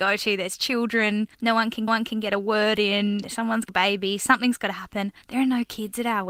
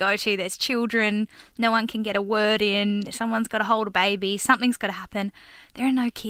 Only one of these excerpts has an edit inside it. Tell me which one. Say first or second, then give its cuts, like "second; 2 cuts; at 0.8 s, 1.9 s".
first; 4 cuts; at 1.3 s, 1.9 s, 3.7 s, 5.2 s